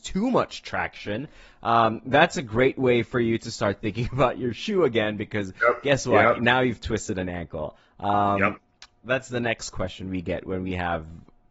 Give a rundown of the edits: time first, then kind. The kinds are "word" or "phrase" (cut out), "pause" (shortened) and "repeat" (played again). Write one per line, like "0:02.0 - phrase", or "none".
none